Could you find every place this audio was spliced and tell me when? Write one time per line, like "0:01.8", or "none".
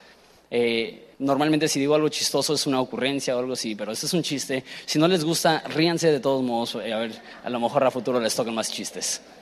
0:01.1